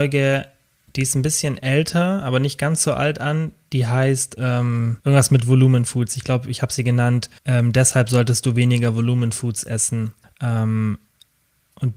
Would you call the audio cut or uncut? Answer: cut